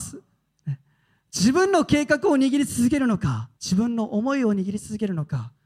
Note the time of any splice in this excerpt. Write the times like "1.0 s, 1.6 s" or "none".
3.6 s

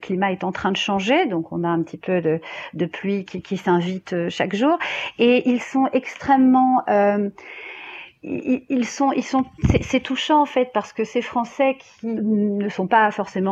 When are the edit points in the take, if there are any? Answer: 3.2 s, 12.2 s

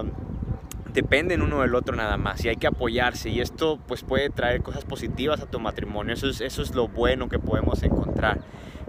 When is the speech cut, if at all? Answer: none

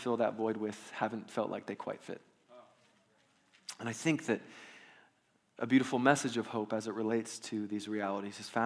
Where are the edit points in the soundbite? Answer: none

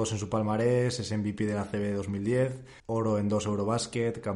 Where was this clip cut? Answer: 2.8 s

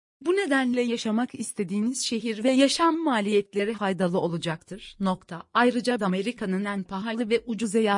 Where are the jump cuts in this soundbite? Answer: 3.7 s, 6.0 s

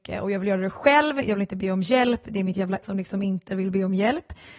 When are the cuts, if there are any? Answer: 2.8 s

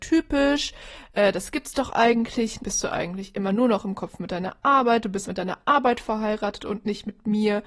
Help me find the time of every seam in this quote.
2.6 s, 5.2 s

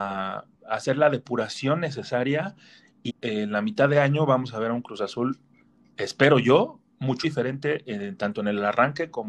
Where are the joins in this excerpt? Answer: 3.1 s, 7.2 s

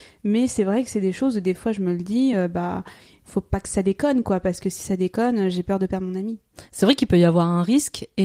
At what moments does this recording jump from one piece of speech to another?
none

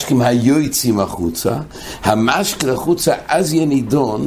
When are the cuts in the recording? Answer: 2.6 s

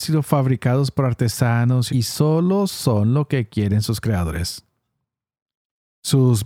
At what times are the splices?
1.9 s

